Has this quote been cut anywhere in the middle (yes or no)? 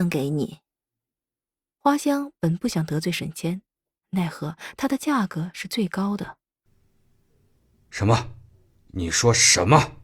no